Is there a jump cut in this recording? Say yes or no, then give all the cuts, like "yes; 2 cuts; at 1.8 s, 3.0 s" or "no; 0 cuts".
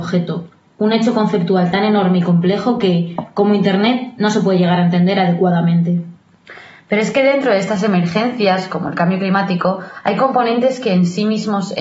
no; 0 cuts